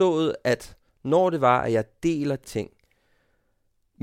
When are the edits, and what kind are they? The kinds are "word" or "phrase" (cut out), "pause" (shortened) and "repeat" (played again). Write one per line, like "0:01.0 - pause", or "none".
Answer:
0:02.4 - word